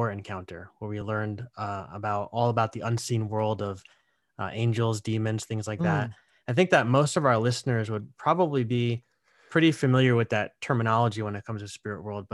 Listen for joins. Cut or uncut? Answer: uncut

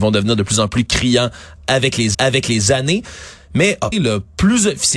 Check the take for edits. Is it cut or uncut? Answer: cut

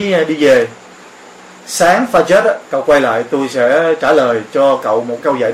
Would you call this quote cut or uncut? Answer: uncut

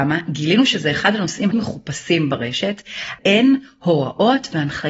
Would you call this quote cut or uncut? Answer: cut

